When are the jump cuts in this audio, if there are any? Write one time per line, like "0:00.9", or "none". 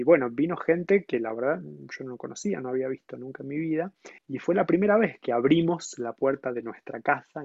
0:04.2